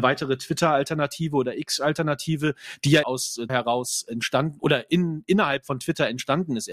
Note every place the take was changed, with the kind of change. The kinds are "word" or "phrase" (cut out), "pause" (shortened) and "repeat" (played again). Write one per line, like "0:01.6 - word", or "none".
0:03.0 - word
0:03.5 - word